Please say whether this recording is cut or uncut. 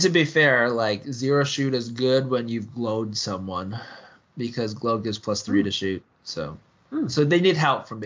uncut